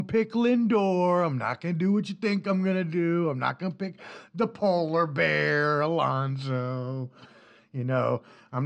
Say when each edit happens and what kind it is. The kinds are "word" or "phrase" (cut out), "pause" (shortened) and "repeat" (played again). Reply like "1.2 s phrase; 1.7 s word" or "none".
none